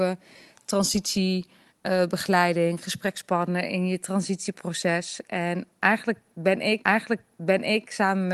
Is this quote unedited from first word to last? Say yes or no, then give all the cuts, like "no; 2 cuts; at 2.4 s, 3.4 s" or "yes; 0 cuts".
no; 1 cut; at 6.8 s